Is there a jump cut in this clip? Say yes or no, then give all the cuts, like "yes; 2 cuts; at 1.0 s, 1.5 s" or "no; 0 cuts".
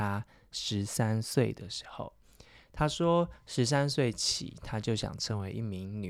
no; 0 cuts